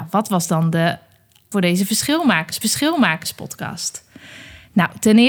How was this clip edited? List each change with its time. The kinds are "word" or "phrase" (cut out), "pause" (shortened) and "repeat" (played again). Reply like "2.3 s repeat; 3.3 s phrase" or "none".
1.5 s word; 2.6 s repeat